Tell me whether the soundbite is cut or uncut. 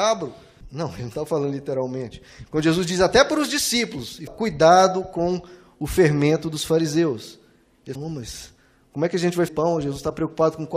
cut